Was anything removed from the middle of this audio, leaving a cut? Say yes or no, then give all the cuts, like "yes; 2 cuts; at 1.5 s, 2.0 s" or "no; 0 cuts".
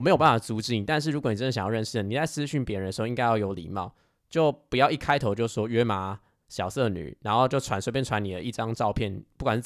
no; 0 cuts